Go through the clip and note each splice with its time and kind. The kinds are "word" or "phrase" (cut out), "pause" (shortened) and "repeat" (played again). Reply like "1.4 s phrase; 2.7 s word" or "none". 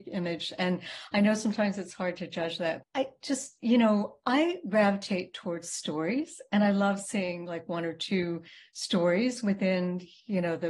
2.8 s word